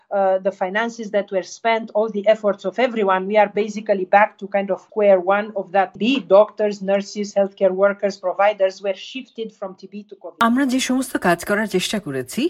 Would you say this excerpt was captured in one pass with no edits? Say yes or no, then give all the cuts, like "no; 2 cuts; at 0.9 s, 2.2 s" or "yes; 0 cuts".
yes; 0 cuts